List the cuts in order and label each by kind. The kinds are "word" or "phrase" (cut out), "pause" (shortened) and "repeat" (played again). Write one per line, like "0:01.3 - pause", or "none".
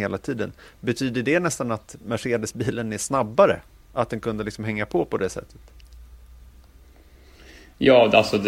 none